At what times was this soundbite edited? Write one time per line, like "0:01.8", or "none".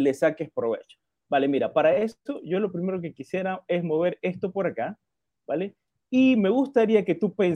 none